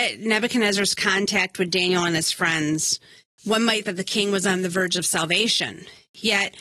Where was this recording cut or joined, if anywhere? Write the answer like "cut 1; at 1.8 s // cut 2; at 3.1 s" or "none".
cut 1; at 3.8 s